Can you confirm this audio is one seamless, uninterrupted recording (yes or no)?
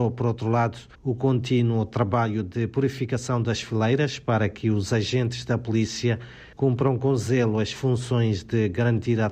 no